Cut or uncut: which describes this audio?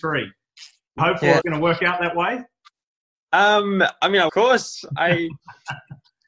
cut